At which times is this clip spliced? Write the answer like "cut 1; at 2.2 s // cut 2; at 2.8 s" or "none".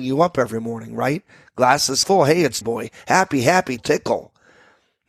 cut 1; at 2.0 s // cut 2; at 2.6 s // cut 3; at 3.8 s